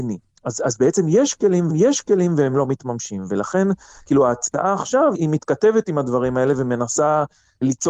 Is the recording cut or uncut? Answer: cut